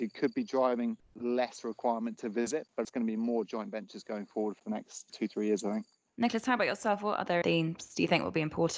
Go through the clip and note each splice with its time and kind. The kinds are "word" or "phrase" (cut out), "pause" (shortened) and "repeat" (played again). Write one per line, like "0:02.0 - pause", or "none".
0:07.4 - word

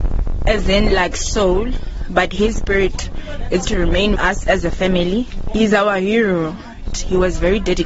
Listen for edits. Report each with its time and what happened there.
0:03.7 - word
0:04.2 - word

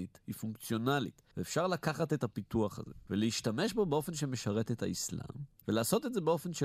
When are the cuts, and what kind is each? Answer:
0:05.6 - pause

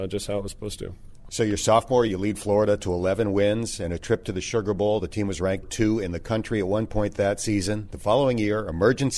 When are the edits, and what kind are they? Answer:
0:02.1 - word
0:05.6 - word

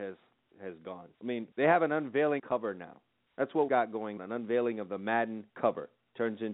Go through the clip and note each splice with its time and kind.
0:01.1 - pause
0:01.5 - pause
0:02.4 - phrase
0:03.3 - pause
0:03.7 - word
0:04.2 - word
0:05.5 - pause

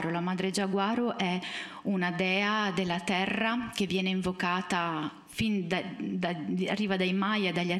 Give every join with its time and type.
none

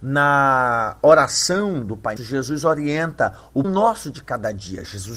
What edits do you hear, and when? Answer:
0:02.2 - word
0:03.6 - word

